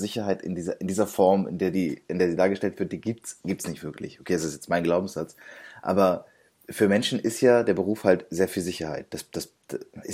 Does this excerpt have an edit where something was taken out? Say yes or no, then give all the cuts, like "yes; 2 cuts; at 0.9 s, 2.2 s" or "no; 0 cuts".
no; 0 cuts